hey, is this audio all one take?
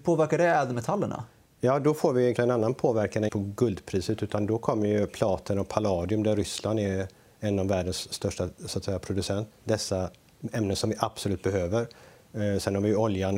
no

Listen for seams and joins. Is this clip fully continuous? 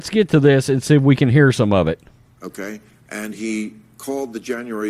yes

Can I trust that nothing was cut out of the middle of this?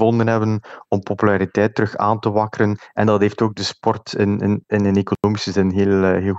yes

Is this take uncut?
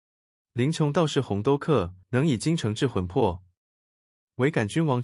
no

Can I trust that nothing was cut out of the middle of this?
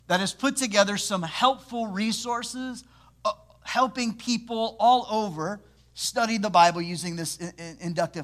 yes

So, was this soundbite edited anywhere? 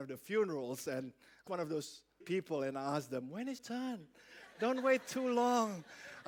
yes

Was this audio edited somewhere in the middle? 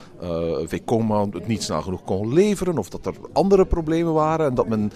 no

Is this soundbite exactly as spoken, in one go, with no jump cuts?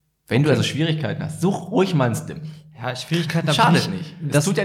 yes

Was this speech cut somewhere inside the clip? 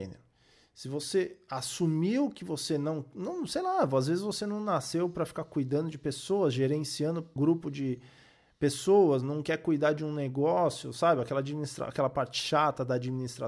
yes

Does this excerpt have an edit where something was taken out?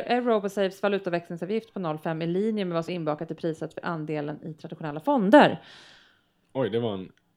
yes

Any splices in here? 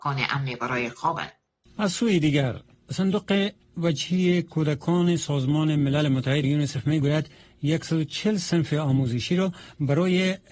yes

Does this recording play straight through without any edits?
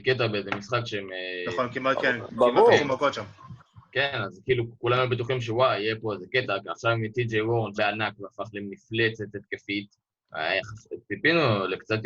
no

